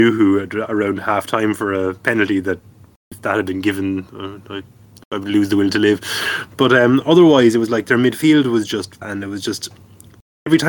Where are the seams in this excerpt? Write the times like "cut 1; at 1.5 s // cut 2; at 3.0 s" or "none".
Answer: cut 1; at 9.0 s